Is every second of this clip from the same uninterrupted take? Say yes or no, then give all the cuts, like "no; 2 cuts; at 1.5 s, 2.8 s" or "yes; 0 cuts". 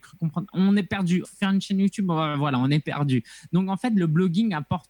no; 1 cut; at 1.2 s